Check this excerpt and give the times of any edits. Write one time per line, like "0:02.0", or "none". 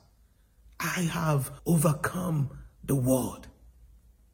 0:01.6